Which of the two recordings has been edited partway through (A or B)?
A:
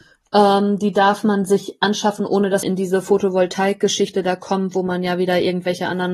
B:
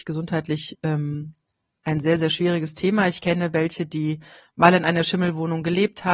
A